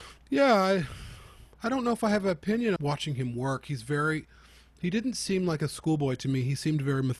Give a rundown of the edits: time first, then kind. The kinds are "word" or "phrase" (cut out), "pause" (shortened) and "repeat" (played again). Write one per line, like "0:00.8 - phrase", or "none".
0:01.5 - pause
0:02.8 - word